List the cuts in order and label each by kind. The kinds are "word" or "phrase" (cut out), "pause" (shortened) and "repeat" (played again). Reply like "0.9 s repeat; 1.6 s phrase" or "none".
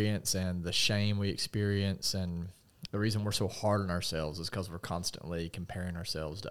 2.9 s word